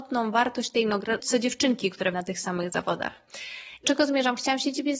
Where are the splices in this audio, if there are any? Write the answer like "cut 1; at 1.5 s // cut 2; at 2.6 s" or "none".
cut 1; at 1.2 s // cut 2; at 2.1 s // cut 3; at 3.8 s